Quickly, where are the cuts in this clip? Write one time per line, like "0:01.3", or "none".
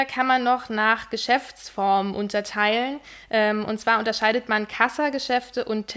none